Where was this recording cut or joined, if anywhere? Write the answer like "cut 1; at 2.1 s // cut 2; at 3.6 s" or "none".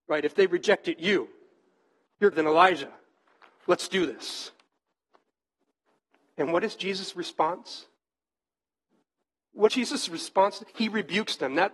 cut 1; at 2.3 s // cut 2; at 9.7 s // cut 3; at 10.7 s

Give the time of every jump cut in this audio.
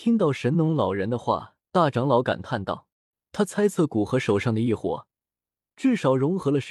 cut 1; at 1.7 s // cut 2; at 2.9 s

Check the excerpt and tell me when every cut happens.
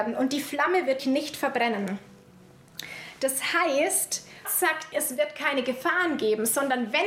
cut 1; at 1.0 s // cut 2; at 4.4 s // cut 3; at 4.9 s

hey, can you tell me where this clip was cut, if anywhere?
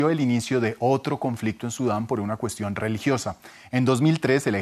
none

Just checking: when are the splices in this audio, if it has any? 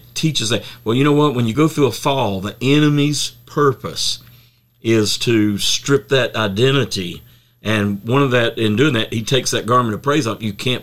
none

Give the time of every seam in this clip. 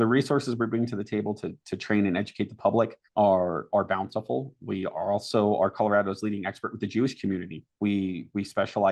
cut 1; at 3.1 s // cut 2; at 7.7 s

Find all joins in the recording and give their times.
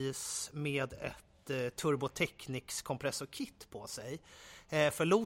none

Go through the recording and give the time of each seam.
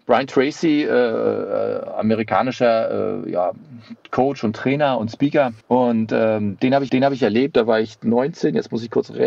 cut 1; at 5.6 s // cut 2; at 6.9 s

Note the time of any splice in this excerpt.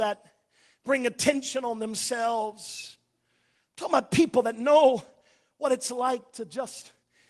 none

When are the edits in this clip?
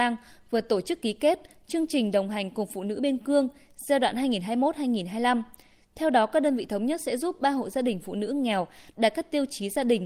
none

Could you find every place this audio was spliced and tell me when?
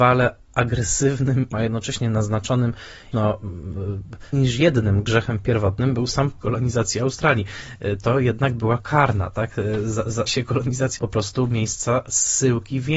cut 1; at 1.5 s // cut 2; at 3.1 s // cut 3; at 4.3 s // cut 4; at 6.4 s // cut 5; at 8.8 s // cut 6; at 10.3 s // cut 7; at 11.0 s

